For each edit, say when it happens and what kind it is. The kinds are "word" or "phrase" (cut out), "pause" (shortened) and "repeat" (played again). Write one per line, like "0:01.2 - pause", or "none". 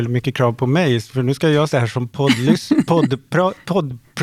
0:01.7 - word